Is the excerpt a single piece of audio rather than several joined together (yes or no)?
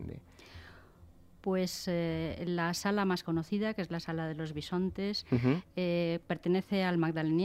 yes